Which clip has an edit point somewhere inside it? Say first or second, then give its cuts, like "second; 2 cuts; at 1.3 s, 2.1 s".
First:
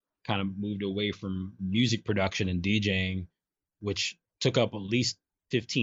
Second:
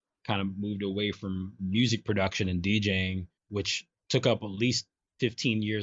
second; 1 cut; at 3.4 s